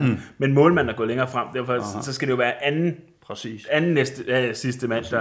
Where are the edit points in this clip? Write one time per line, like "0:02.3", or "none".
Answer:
none